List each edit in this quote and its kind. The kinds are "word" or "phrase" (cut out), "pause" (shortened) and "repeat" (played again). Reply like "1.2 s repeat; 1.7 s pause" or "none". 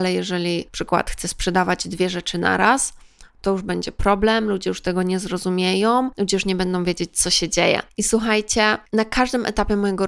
none